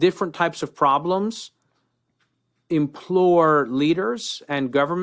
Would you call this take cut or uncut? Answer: uncut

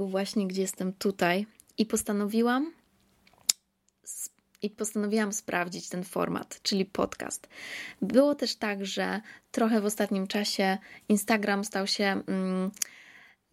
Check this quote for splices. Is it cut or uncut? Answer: uncut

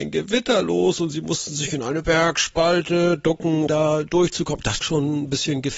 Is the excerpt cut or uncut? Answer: cut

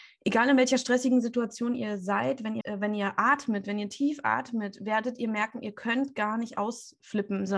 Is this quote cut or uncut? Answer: cut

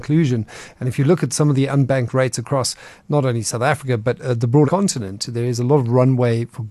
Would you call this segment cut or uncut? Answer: cut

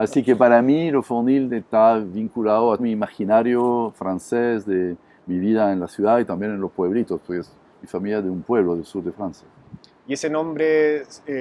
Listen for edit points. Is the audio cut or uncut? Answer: cut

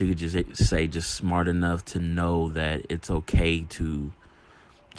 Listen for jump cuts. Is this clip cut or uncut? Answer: uncut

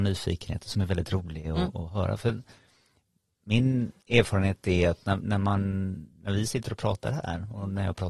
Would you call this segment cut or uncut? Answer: cut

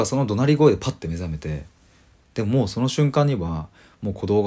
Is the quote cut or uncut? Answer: uncut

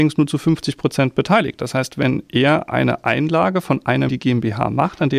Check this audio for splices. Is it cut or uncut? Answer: cut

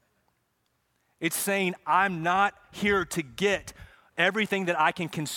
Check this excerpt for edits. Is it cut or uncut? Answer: uncut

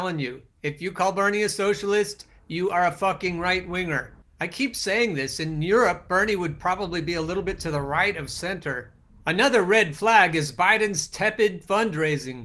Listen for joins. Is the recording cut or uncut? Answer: uncut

